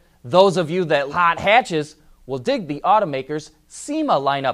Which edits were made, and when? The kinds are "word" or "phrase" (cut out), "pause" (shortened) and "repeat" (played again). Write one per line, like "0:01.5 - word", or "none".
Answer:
0:01.1 - word